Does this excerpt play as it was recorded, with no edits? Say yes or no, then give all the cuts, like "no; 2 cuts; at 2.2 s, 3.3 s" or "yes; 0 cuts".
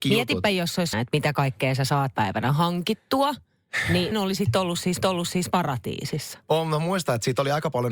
no; 4 cuts; at 0.9 s, 2.1 s, 4.1 s, 5.0 s